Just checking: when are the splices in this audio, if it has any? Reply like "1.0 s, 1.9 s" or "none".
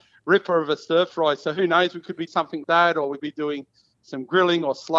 2.3 s, 2.6 s, 3.2 s